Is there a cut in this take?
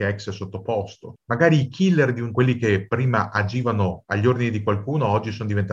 yes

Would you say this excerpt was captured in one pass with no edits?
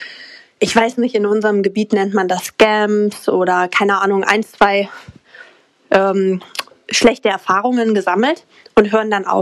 yes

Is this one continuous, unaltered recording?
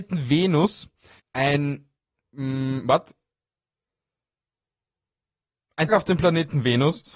no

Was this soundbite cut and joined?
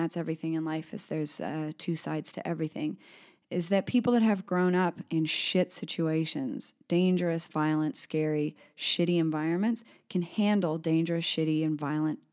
no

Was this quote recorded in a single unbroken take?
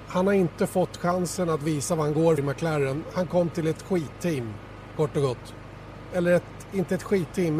no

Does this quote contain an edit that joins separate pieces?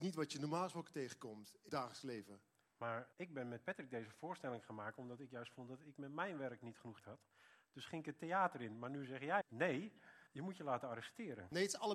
yes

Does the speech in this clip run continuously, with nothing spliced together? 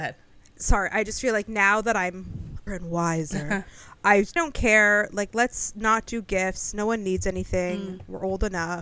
no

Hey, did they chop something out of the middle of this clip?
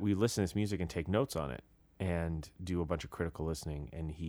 no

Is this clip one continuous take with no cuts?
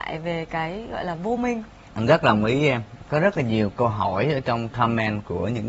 yes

